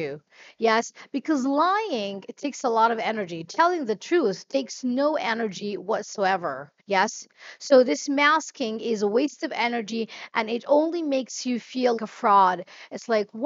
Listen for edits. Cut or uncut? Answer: cut